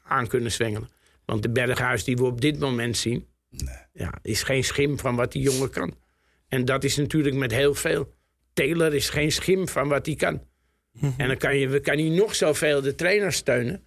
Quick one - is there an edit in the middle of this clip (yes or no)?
no